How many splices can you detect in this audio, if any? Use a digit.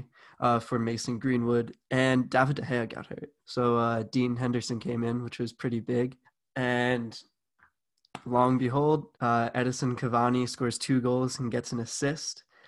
3